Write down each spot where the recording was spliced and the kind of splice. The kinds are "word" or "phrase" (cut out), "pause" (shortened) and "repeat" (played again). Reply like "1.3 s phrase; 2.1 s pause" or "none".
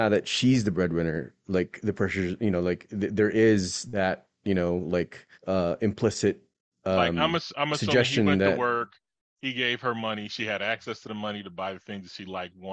5.3 s pause